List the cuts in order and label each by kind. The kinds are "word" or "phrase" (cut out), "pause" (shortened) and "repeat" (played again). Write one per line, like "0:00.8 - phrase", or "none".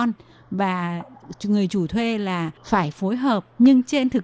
0:02.6 - pause